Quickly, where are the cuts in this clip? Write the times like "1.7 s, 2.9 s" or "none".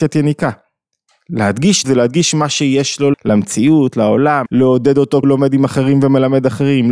1.8 s, 3.1 s, 4.5 s, 5.2 s